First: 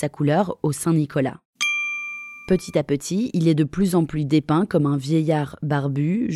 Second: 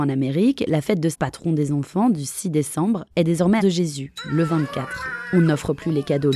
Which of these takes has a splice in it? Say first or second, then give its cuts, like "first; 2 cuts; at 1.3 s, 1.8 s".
second; 3 cuts; at 1.1 s, 3.1 s, 3.6 s